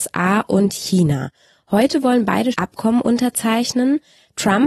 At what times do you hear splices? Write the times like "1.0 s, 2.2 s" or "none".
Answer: 2.5 s